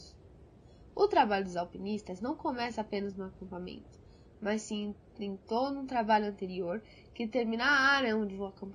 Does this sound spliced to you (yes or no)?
no